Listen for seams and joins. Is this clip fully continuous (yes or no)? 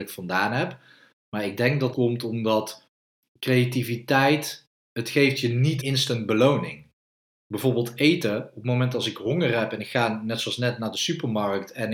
no